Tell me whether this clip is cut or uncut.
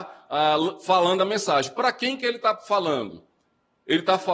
uncut